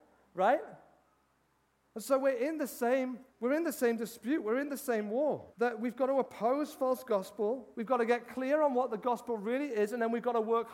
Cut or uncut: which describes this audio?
cut